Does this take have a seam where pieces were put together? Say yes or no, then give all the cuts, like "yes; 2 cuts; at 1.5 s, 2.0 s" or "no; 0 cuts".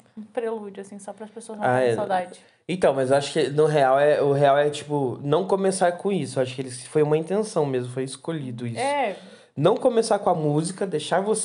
no; 0 cuts